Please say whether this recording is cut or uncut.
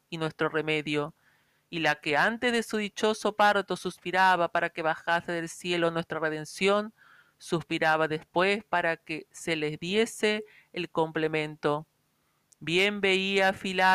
uncut